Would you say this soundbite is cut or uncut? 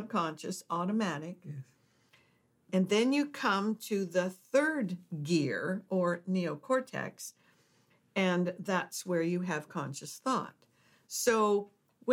uncut